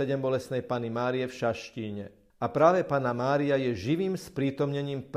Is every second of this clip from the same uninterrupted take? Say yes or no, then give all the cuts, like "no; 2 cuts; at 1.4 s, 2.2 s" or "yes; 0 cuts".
yes; 0 cuts